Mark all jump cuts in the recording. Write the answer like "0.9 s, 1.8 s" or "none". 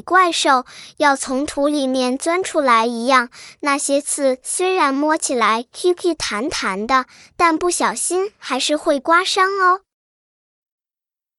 none